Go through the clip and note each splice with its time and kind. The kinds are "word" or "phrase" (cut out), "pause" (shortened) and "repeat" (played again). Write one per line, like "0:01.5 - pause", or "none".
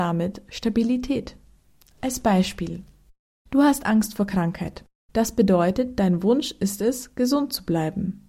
none